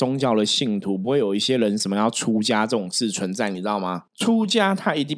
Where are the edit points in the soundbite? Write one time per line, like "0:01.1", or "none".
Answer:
0:04.1